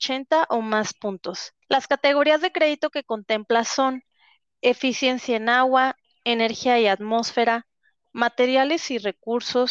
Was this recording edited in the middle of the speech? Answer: yes; 1 cut; at 1.6 s

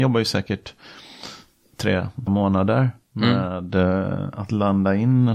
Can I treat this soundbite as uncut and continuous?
no; 1 cut; at 2.3 s

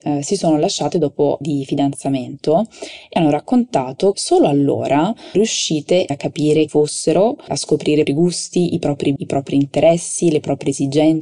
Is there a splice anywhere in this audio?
yes; 9 cuts; at 1.4 s, 3.2 s, 4.1 s, 5.3 s, 6.1 s, 6.7 s, 7.5 s, 8.1 s, 9.2 s

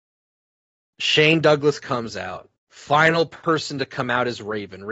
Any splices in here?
yes; 1 cut; at 2.6 s

